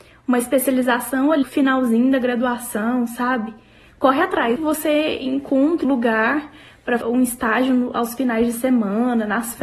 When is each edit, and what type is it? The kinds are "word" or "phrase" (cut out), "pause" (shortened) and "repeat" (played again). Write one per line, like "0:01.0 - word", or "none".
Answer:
0:01.4 - word
0:04.6 - word
0:05.8 - word
0:07.0 - word